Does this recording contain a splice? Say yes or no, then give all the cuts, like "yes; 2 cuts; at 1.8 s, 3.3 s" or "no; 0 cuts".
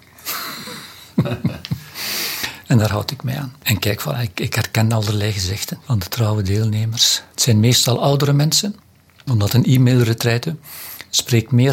no; 0 cuts